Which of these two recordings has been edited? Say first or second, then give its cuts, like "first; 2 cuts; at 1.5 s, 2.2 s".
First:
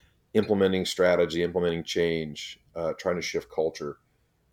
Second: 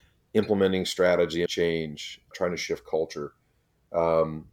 second; 2 cuts; at 1.5 s, 2.3 s